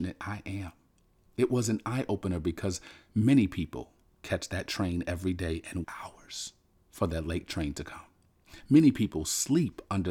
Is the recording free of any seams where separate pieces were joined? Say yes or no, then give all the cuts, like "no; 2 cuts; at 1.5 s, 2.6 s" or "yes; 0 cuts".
no; 1 cut; at 5.8 s